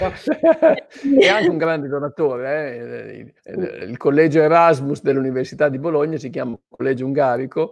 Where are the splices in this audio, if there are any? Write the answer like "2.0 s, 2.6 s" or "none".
3.4 s